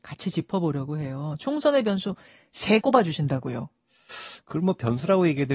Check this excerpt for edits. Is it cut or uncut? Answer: cut